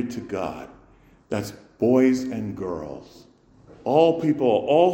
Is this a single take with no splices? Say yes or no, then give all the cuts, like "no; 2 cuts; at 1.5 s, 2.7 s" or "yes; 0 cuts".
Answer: yes; 0 cuts